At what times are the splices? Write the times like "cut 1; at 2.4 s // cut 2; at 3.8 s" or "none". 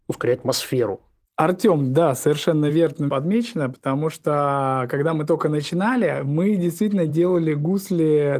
none

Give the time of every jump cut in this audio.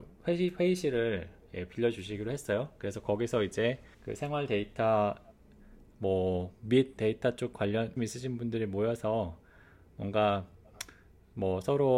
cut 1; at 3.9 s // cut 2; at 7.0 s // cut 3; at 8.0 s

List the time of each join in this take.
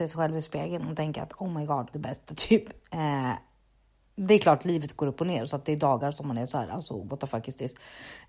cut 1; at 1.9 s

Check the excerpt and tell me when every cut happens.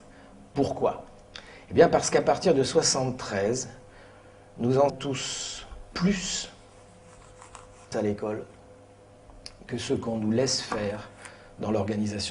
cut 1; at 4.9 s // cut 2; at 7.9 s

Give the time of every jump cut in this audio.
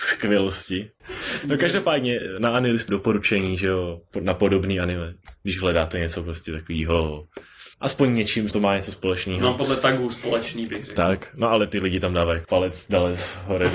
cut 1; at 2.9 s // cut 2; at 7.7 s // cut 3; at 8.5 s // cut 4; at 12.4 s

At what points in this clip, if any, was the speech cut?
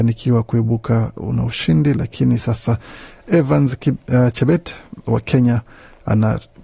none

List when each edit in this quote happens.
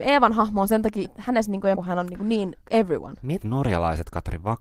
cut 1; at 1.0 s // cut 2; at 1.7 s // cut 3; at 2.6 s // cut 4; at 3.4 s

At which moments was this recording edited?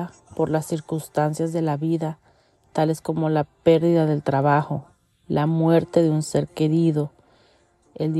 none

